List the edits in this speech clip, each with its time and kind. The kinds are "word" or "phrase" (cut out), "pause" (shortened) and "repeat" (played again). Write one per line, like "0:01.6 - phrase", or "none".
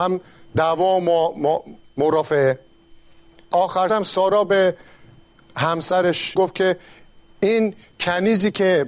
0:03.5 - word
0:03.9 - word
0:06.4 - word